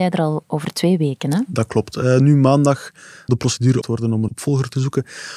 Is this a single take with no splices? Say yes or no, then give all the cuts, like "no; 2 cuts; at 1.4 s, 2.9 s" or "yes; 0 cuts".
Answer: no; 3 cuts; at 3.3 s, 3.8 s, 4.3 s